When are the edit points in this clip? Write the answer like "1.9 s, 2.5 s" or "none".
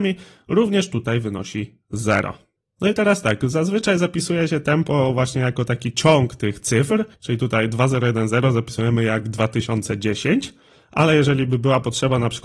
7.1 s